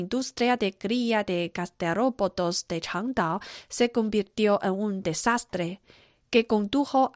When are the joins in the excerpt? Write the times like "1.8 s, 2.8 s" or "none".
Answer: none